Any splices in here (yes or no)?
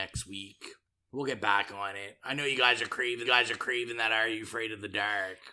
yes